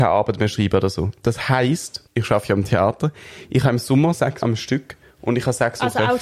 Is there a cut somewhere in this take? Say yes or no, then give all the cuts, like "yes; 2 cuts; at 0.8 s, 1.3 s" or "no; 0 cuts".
yes; 2 cuts; at 2.1 s, 4.4 s